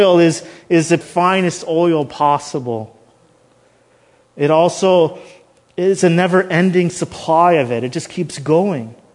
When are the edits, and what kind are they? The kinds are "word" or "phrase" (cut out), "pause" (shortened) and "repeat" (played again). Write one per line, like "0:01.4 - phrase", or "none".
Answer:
0:01.0 - phrase